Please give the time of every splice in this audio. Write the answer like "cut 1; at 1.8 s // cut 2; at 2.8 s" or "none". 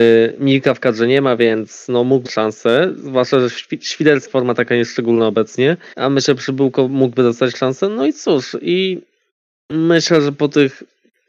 cut 1; at 2.3 s // cut 2; at 4.3 s // cut 3; at 5.9 s